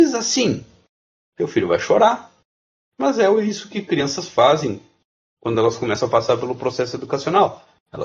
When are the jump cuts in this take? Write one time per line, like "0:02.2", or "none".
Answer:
none